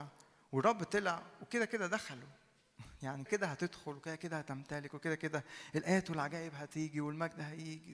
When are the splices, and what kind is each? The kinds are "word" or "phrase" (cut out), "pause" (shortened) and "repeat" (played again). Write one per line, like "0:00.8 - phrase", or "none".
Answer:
0:03.3 - word

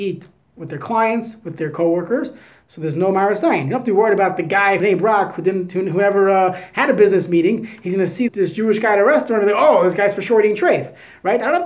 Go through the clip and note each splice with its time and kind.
0:04.8 - word
0:08.3 - word

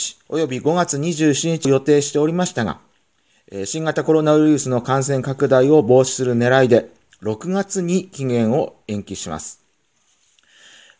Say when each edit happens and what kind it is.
none

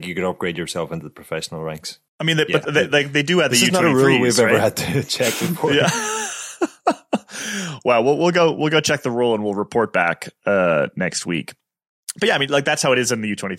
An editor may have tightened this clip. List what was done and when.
0:02.1 - pause

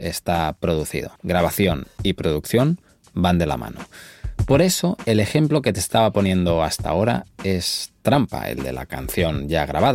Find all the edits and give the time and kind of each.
0:01.2 - pause

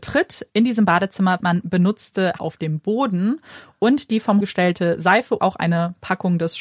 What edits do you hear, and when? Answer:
0:01.4 - word
0:02.4 - word
0:04.4 - word
0:05.4 - word

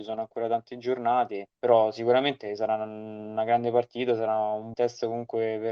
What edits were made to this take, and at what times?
0:01.5 - pause
0:04.7 - word

